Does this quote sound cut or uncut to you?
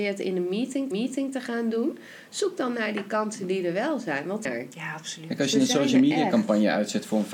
cut